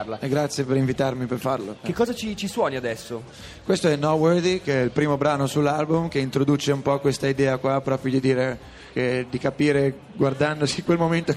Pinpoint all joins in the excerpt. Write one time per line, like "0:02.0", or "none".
0:08.9